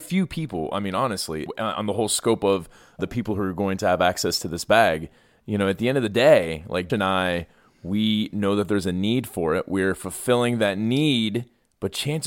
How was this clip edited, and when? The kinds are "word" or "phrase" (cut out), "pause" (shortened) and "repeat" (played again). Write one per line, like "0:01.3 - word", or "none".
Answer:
0:01.5 - word
0:03.0 - word
0:06.9 - word